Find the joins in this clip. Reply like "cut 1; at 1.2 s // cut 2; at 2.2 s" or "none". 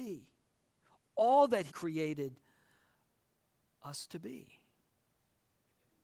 cut 1; at 1.7 s